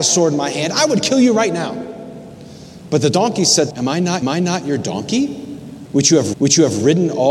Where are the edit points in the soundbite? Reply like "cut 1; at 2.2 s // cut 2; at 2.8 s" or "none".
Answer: cut 1; at 3.7 s // cut 2; at 4.2 s // cut 3; at 6.3 s